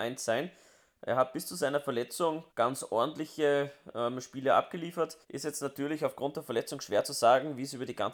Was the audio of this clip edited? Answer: yes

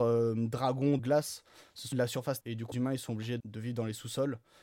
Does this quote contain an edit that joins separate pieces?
yes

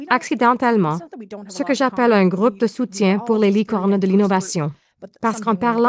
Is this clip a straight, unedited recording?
yes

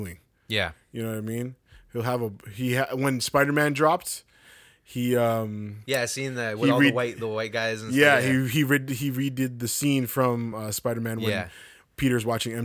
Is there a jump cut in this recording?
no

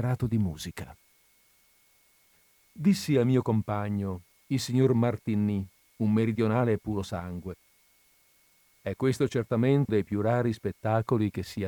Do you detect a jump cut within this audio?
yes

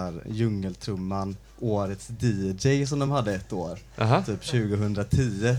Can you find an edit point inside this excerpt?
no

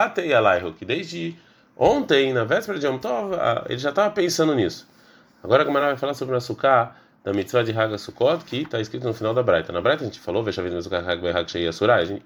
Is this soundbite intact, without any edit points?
yes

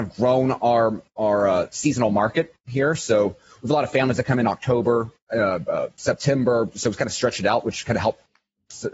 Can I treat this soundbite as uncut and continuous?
yes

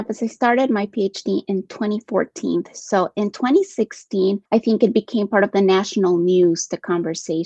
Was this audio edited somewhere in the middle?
yes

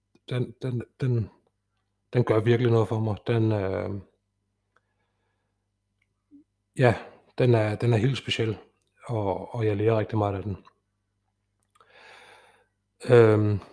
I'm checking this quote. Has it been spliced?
no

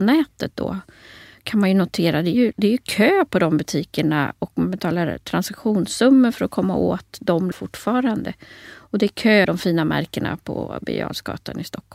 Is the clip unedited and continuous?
no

